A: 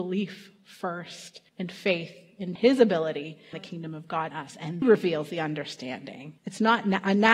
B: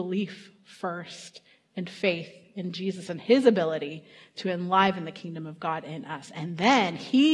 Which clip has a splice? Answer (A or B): A